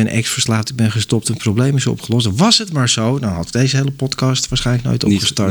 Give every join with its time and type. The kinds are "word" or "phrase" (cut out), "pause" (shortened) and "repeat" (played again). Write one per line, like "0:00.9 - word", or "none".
none